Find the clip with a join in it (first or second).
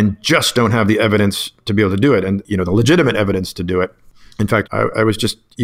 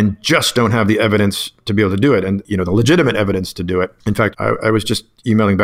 second